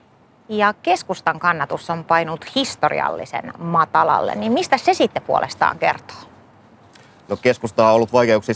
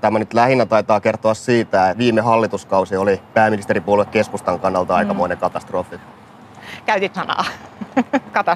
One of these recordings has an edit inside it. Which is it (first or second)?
second